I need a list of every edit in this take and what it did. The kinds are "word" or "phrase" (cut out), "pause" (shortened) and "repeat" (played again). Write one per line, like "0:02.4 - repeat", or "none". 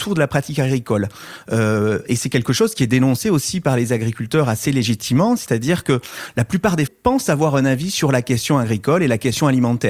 0:06.9 - word